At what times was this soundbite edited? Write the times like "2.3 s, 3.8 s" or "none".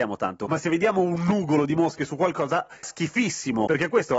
2.8 s